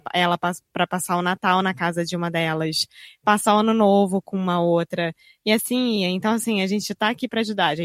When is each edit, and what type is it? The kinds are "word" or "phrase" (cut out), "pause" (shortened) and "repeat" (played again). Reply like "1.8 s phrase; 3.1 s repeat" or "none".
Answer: none